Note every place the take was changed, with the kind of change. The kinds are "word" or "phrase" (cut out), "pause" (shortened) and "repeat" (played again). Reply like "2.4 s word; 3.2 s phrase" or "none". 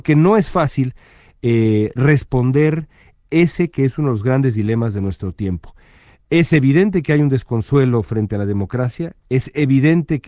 none